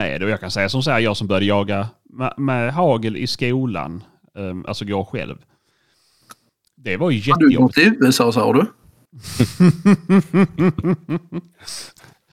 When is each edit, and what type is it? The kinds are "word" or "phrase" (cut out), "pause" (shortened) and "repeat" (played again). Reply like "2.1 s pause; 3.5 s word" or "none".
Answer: none